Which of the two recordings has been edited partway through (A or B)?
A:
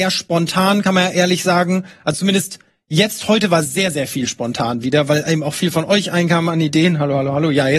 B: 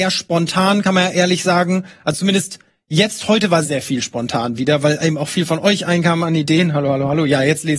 B